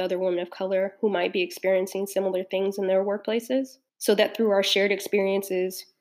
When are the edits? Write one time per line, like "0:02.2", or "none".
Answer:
0:03.9